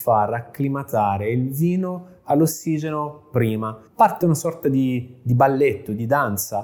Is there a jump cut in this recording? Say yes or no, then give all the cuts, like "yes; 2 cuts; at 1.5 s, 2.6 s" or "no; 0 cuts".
yes; 1 cut; at 3.9 s